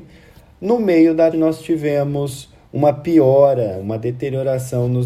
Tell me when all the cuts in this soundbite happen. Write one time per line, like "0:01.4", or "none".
0:01.3